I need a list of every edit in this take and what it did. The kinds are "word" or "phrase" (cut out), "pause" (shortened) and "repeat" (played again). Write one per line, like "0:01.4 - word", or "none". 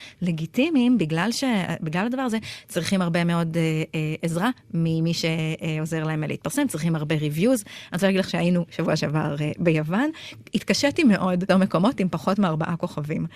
0:11.5 - word

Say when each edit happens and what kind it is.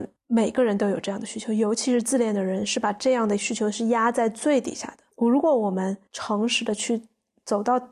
0:05.1 - pause

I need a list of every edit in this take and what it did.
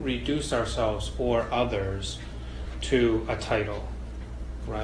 none

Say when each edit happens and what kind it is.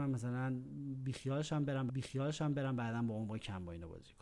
0:01.9 - repeat

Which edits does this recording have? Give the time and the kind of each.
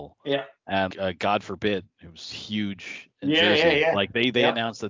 0:00.9 - word
0:01.9 - pause

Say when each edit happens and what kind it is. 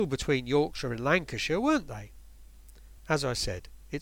0:03.0 - pause

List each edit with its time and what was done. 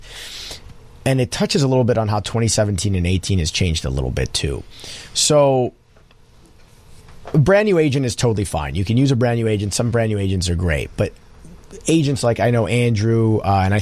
none

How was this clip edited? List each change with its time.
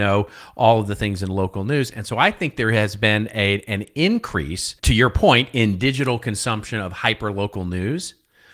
0:04.8 - pause

